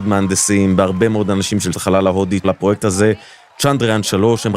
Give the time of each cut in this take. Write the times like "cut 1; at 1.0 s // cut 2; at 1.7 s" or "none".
cut 1; at 1.7 s // cut 2; at 2.4 s